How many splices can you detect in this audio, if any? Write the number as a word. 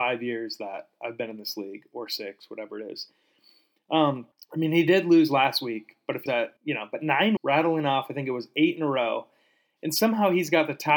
four